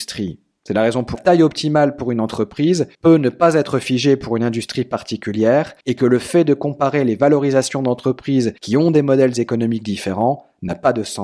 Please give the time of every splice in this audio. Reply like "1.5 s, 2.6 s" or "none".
1.1 s, 2.9 s, 5.8 s, 8.6 s